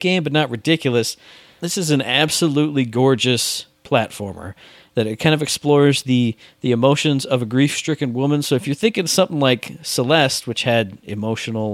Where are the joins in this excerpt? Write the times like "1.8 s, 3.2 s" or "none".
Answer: none